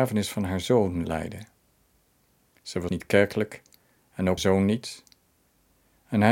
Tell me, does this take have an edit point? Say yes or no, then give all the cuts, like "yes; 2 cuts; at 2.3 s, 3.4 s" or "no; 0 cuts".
yes; 3 cuts; at 1.0 s, 2.9 s, 4.4 s